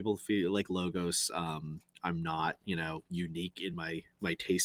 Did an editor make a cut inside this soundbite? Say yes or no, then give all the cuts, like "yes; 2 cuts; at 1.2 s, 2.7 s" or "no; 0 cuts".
no; 0 cuts